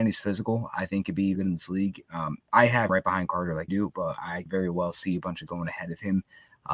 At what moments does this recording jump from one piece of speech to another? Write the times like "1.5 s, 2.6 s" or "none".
1.0 s, 1.4 s, 2.9 s, 3.7 s, 4.5 s, 5.5 s